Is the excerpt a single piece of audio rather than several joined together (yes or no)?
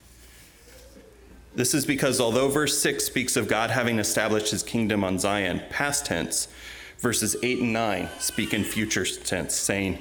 yes